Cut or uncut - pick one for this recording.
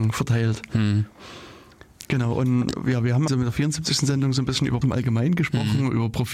cut